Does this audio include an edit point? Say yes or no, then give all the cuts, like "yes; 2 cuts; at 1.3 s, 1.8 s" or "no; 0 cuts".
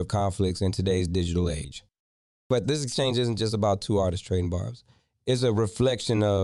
yes; 1 cut; at 2.6 s